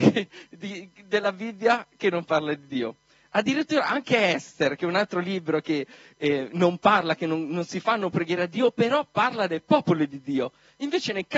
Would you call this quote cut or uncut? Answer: uncut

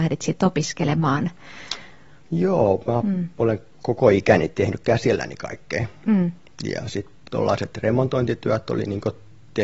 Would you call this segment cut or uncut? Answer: cut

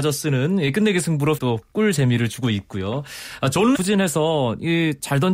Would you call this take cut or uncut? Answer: cut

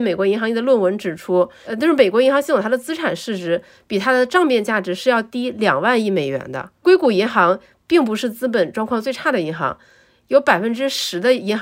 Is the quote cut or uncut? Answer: uncut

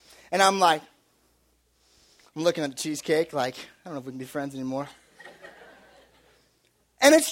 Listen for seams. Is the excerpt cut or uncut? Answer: uncut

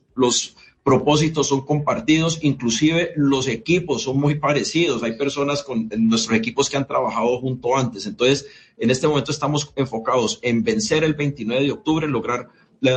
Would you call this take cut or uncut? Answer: uncut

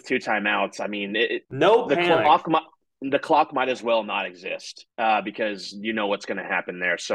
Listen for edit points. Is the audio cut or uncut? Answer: cut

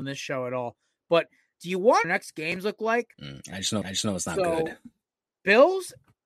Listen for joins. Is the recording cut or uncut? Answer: cut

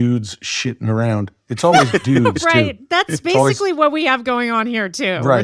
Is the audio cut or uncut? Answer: uncut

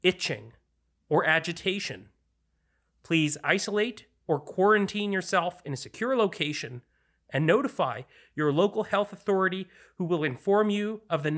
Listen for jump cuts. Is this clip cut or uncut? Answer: uncut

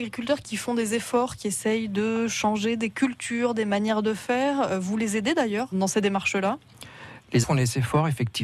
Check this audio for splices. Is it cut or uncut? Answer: cut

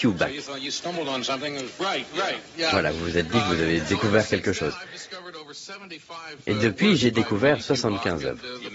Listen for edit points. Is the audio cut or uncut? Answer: uncut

